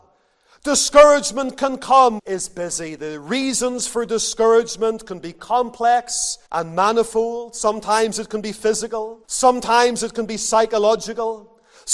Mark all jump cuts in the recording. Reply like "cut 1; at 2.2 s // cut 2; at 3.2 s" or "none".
cut 1; at 2.2 s // cut 2; at 6.5 s // cut 3; at 9.2 s